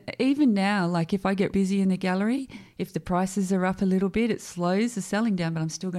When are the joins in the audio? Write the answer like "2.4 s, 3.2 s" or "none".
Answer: 1.5 s